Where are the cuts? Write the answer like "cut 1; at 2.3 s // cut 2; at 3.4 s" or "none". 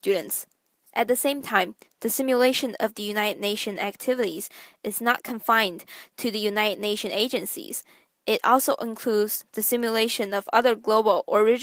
none